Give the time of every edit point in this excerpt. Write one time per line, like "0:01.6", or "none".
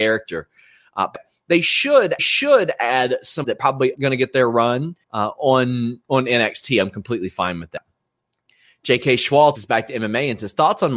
0:01.1
0:02.2
0:03.4
0:03.9
0:05.0
0:08.0
0:09.5